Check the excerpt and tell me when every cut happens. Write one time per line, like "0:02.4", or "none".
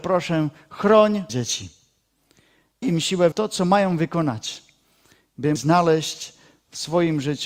0:01.3
0:02.8
0:03.3
0:05.6